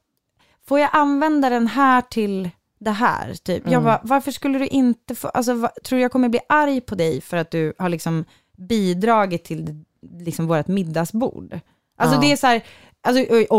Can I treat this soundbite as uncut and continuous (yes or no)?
yes